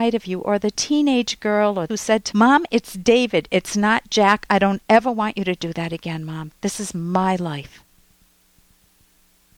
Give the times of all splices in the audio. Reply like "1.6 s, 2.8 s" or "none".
1.9 s, 2.3 s